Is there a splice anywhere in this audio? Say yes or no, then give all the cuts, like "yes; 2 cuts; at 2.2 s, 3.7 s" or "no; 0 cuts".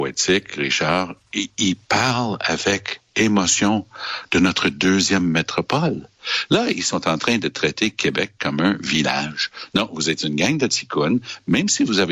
no; 0 cuts